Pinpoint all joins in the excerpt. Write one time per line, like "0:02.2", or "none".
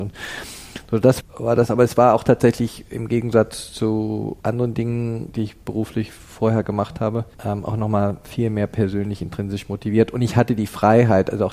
0:01.2
0:04.4
0:07.3